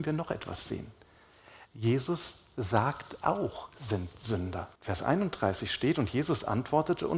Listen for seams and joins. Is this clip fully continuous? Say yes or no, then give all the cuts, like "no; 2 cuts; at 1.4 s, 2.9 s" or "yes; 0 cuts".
no; 2 cuts; at 3.7 s, 4.8 s